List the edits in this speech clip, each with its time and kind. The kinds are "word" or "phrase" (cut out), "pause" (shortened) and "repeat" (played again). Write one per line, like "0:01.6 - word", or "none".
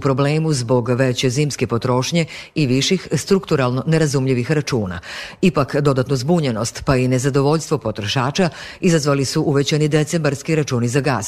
none